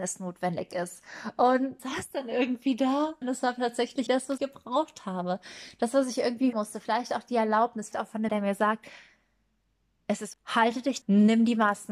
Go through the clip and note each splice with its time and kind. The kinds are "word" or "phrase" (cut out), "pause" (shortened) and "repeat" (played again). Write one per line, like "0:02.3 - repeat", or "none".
0:01.8 - word
0:03.2 - word
0:04.1 - word
0:04.4 - word
0:06.5 - word
0:07.9 - word
0:08.3 - word
0:10.3 - word
0:11.0 - word

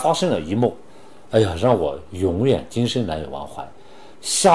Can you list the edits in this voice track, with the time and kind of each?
none

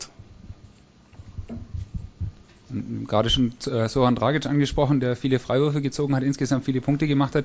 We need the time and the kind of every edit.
none

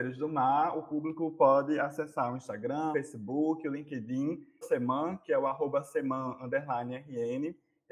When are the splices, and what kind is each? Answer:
0:02.9 - word
0:04.6 - word

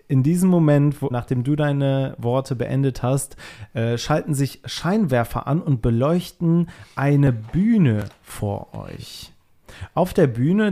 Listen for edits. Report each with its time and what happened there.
0:01.1 - word

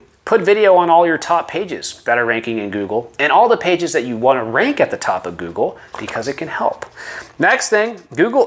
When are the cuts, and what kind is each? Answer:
none

